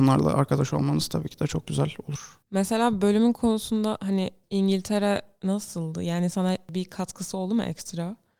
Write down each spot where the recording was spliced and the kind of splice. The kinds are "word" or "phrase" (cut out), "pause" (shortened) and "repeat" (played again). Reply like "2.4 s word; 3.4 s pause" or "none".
2.4 s pause